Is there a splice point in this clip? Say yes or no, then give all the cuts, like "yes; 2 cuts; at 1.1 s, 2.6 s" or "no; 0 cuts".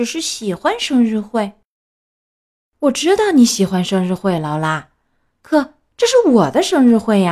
no; 0 cuts